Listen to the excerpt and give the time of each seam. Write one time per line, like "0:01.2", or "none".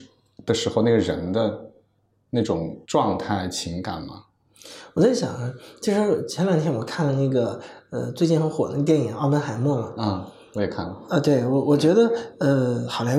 0:02.8